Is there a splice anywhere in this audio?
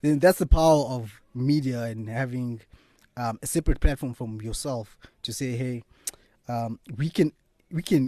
no; 0 cuts

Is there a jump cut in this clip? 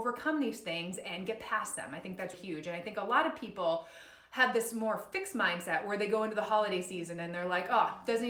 yes; 1 cut; at 2.3 s

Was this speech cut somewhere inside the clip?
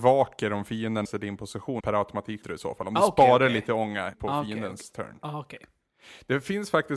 yes; 4 cuts; at 1.0 s, 1.8 s, 2.4 s, 4.1 s

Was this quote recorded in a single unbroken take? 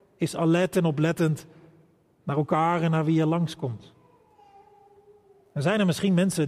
yes; 0 cuts

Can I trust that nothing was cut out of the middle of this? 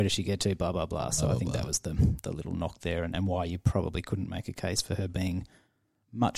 yes; 0 cuts

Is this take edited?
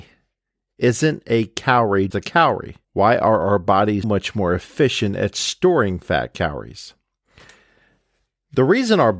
yes; 3 cuts; at 2.1 s, 2.8 s, 4.0 s

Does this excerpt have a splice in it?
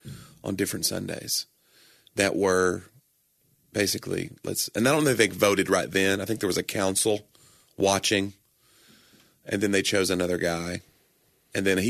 no; 0 cuts

